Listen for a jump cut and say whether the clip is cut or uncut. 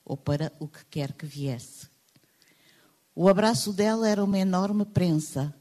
uncut